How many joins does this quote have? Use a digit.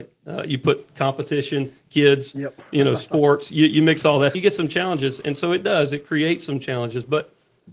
1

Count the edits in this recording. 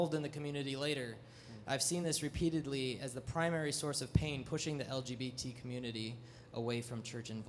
0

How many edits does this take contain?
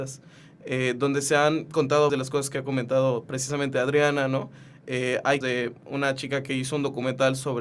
2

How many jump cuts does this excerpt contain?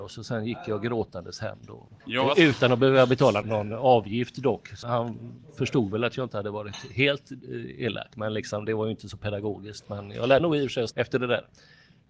5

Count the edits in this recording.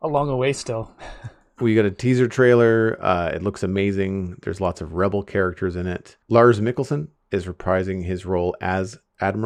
1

